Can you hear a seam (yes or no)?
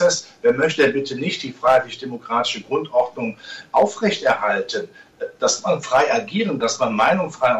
yes